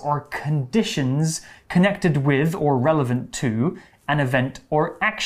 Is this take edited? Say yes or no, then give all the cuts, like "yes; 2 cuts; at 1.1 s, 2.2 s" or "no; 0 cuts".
no; 0 cuts